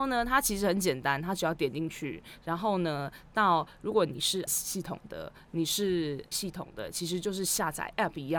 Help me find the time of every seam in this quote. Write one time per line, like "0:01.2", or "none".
0:04.5
0:06.3